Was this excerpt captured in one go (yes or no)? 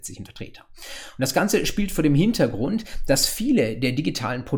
yes